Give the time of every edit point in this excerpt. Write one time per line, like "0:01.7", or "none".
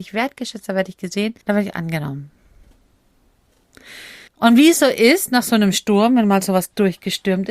0:01.4
0:04.3

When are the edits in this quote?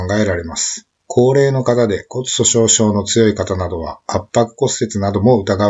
0:01.0

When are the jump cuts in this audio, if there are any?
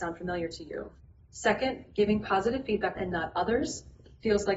0:01.0
0:03.0

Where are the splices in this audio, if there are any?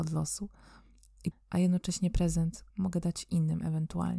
0:01.3
0:02.7

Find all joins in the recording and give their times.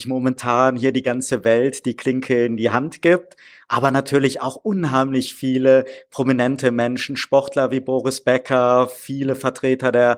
none

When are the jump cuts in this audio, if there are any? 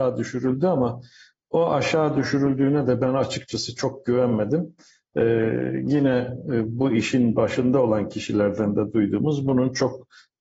none

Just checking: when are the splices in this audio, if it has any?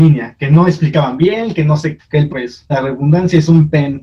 0:02.0
0:02.3
0:02.7

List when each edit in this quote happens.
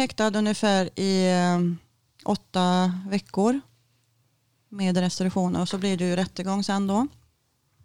none

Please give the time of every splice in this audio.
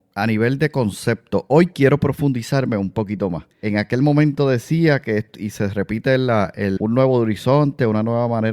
0:03.5
0:05.3
0:06.8

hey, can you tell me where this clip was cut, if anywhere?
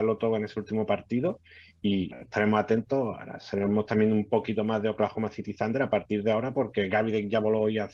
0:02.1

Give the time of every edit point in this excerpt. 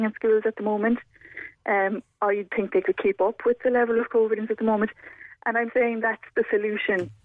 0:02.5
0:04.5
0:05.7
0:06.0

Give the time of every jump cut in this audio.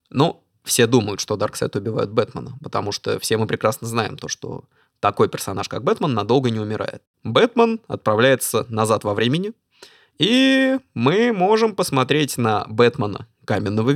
0:07.1

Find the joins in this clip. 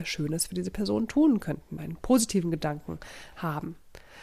0:01.8

